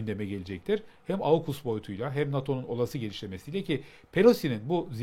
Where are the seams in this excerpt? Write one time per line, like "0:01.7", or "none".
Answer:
none